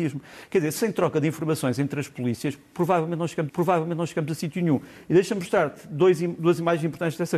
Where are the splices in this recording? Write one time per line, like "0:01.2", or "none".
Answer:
0:03.5